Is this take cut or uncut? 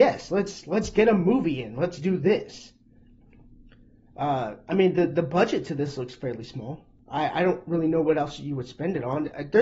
uncut